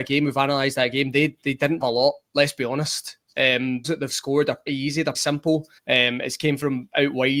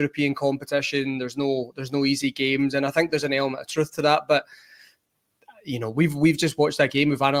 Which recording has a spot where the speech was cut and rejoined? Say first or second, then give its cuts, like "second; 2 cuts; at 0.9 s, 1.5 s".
first; 5 cuts; at 1.8 s, 3.8 s, 4.7 s, 5.1 s, 5.8 s